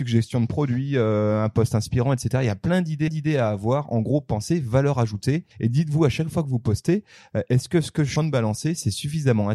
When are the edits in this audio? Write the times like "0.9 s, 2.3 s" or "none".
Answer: 3.1 s, 5.5 s, 8.2 s